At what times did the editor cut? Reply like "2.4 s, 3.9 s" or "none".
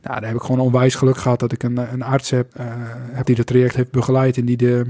2.5 s, 3.2 s, 3.7 s